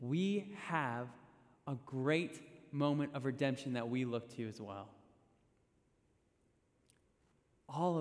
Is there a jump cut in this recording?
no; 0 cuts

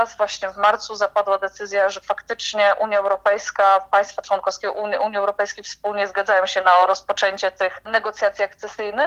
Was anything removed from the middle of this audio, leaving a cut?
no; 0 cuts

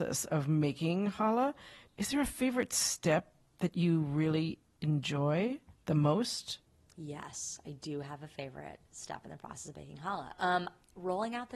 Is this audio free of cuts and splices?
yes; 0 cuts

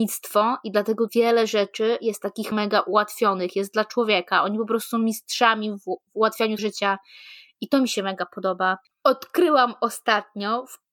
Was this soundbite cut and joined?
yes; 3 cuts; at 1.1 s, 2.5 s, 6.6 s

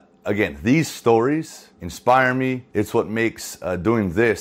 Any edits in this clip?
yes; 2 cuts; at 1.7 s, 2.7 s

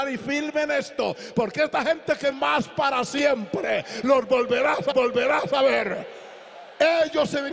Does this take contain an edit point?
yes; 2 cuts; at 2.3 s, 4.9 s

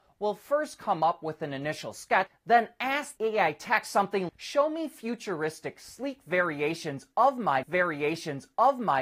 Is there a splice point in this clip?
yes; 4 cuts; at 2.3 s, 3.2 s, 4.3 s, 7.6 s

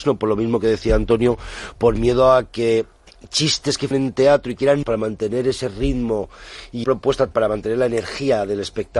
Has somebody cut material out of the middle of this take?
yes; 4 cuts; at 3.9 s, 4.8 s, 6.8 s, 7.3 s

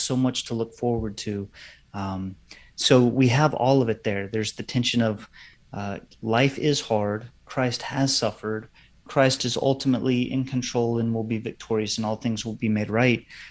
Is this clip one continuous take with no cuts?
yes; 0 cuts

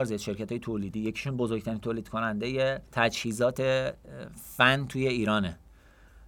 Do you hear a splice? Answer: yes; 1 cut; at 2.9 s

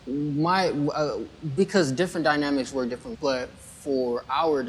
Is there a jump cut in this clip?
yes; 1 cut; at 3.1 s

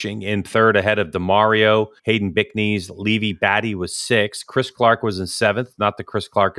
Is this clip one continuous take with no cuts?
no; 1 cut; at 2.0 s

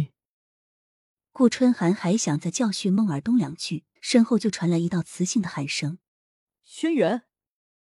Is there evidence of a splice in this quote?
yes; 2 cuts; at 4.0 s, 6.1 s

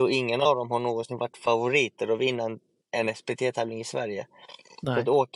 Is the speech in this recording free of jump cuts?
yes; 0 cuts

